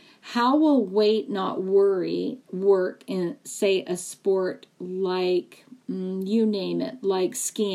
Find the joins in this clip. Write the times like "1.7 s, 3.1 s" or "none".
2.4 s